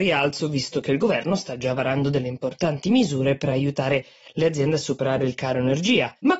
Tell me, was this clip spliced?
no; 0 cuts

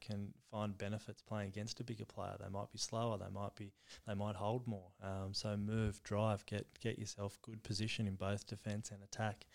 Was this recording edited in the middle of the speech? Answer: no; 0 cuts

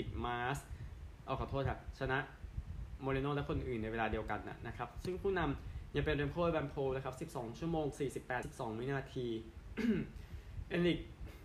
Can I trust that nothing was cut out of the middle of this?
no; 1 cut; at 8.4 s

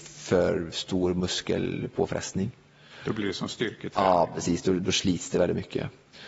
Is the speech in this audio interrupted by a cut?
no; 0 cuts

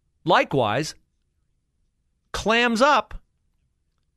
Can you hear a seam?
no; 0 cuts

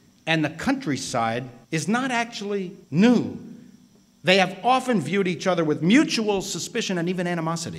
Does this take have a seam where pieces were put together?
yes; 2 cuts; at 1.6 s, 2.8 s

